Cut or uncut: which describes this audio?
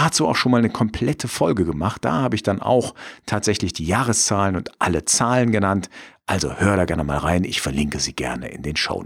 uncut